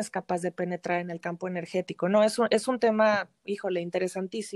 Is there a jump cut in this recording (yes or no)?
no